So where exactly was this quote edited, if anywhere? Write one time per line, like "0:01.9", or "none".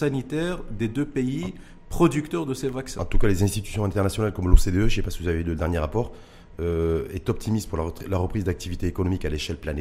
none